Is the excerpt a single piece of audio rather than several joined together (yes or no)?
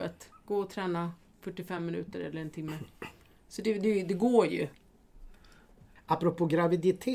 yes